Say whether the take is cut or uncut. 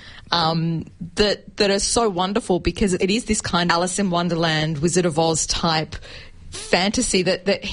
cut